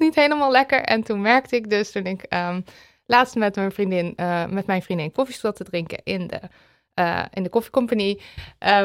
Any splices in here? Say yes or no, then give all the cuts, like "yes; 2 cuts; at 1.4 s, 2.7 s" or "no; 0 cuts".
no; 0 cuts